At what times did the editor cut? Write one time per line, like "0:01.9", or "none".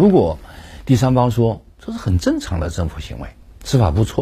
0:01.7

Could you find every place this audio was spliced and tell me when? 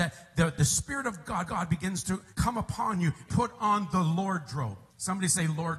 0:01.5
0:02.3
0:03.3
0:04.9

